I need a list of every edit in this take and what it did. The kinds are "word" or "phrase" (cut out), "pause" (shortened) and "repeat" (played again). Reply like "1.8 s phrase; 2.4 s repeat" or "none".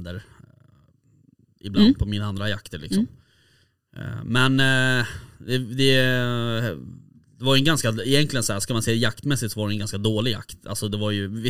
none